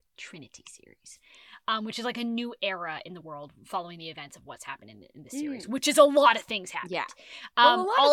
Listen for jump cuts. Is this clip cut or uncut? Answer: uncut